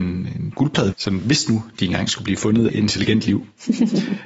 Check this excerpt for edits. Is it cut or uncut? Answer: cut